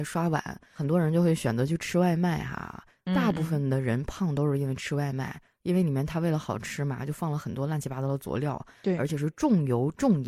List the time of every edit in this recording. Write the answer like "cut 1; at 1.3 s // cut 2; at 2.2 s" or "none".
none